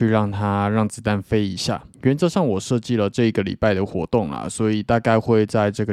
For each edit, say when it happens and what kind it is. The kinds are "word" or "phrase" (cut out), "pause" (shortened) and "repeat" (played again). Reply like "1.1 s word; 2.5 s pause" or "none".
1.9 s pause